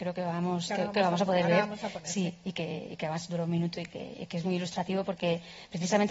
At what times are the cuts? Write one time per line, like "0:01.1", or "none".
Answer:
none